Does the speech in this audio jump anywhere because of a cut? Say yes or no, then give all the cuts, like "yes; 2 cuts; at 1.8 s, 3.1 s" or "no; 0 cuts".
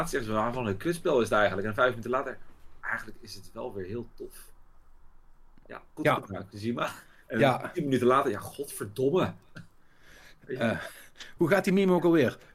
yes; 3 cuts; at 2.8 s, 6.0 s, 11.4 s